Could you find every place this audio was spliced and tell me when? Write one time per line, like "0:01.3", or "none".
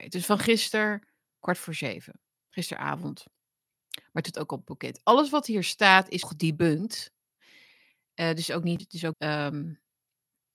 0:04.3
0:06.2
0:08.8
0:09.1